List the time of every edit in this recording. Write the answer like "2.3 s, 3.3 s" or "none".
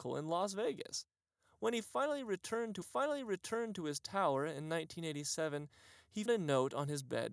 2.8 s, 6.3 s